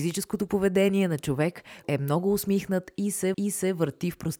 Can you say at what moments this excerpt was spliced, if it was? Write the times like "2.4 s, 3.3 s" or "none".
1.8 s, 3.3 s